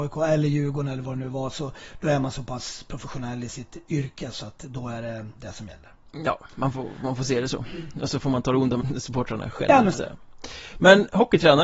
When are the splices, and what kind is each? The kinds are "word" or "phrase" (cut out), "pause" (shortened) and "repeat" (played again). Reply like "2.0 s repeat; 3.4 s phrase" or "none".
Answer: 8.8 s phrase; 9.9 s word